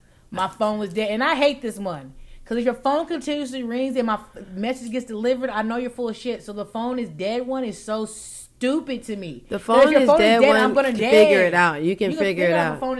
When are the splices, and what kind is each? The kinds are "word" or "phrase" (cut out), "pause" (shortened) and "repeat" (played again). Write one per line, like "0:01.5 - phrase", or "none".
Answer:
0:11.0 - phrase